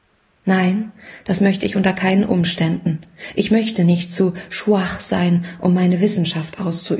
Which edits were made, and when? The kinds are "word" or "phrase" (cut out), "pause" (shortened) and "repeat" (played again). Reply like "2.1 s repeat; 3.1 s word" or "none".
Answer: none